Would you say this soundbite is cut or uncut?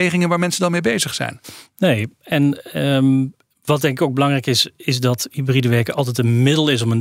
uncut